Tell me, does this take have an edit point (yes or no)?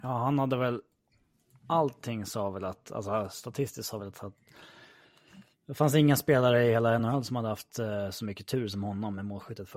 no